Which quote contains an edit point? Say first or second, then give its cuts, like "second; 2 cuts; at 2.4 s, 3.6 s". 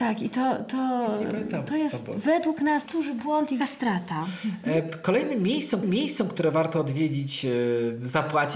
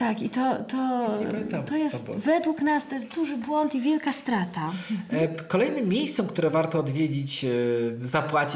first; 3 cuts; at 2.9 s, 3.6 s, 5.8 s